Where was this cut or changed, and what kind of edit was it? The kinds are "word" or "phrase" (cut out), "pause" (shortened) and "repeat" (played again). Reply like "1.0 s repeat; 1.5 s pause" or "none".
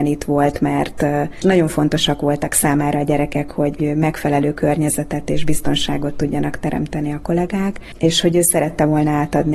none